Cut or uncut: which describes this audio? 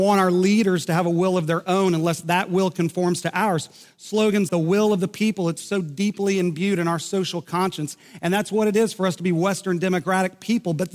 cut